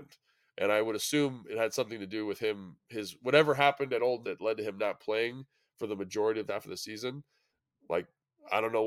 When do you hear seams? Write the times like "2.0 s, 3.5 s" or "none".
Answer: 4.2 s, 6.5 s